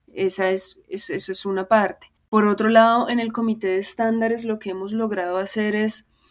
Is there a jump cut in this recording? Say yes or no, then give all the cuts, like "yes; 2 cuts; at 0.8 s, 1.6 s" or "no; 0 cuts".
yes; 1 cut; at 2.2 s